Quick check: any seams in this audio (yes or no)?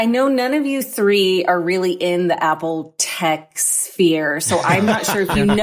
no